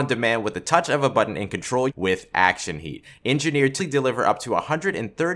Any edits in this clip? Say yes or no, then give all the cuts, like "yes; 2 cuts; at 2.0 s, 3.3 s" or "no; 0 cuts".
yes; 2 cuts; at 1.9 s, 3.8 s